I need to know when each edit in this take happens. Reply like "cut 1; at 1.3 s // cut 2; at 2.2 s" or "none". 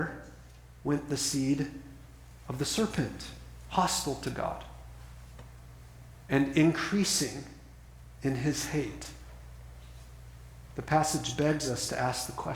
none